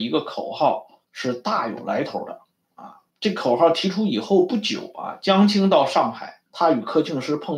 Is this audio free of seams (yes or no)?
no